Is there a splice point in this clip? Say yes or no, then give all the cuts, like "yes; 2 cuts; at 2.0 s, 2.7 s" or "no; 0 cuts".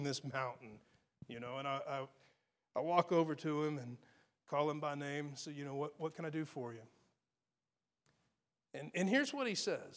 no; 0 cuts